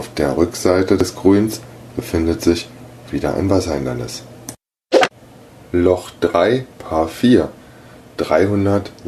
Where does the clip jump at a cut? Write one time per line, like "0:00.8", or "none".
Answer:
0:06.7